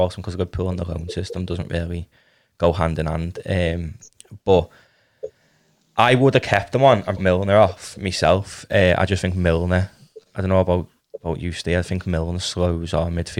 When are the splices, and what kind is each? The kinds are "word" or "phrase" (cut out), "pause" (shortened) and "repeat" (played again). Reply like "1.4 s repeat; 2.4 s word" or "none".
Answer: 7.2 s word

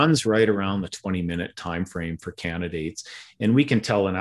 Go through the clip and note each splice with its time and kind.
none

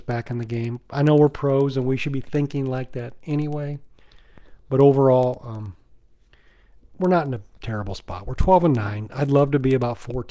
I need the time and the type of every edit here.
none

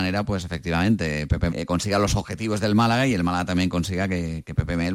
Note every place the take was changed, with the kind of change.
1.5 s word

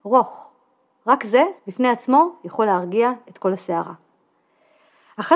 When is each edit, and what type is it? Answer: 1.6 s pause

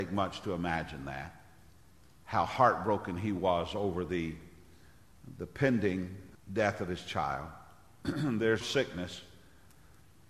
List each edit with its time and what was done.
1.7 s pause; 6.3 s word; 8.6 s word

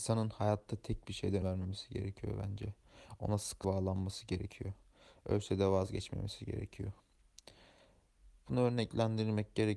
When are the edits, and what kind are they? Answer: 1.4 s word; 3.6 s word

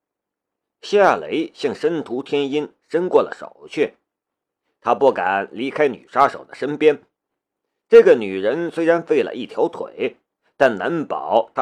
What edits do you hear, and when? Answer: none

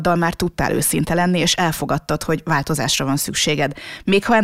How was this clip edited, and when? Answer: none

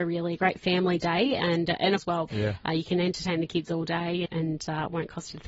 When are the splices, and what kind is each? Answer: 2.0 s word; 2.3 s word; 4.3 s word

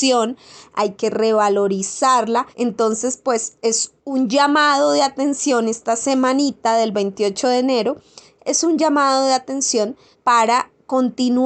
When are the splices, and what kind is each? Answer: 2.5 s pause; 4.0 s pause; 10.1 s pause

